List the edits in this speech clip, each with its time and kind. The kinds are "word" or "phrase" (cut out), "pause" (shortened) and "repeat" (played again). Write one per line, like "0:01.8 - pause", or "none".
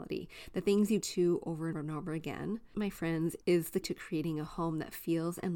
0:01.0 - word
0:01.7 - word
0:02.7 - word
0:03.8 - word